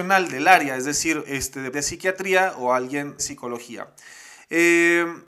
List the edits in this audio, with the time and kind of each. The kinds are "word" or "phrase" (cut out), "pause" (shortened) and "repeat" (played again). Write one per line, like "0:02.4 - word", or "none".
0:01.7 - phrase
0:03.2 - word